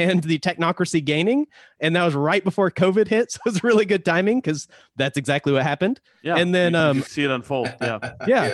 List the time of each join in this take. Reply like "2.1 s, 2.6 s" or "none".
none